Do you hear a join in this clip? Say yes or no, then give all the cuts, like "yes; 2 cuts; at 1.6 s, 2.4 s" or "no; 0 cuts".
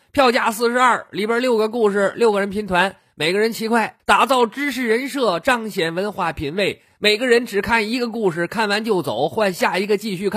yes; 1 cut; at 4.0 s